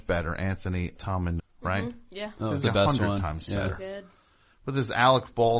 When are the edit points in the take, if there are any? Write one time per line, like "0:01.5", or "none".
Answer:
0:00.9
0:01.4
0:02.6